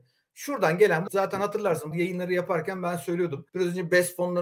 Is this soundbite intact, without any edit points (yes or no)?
no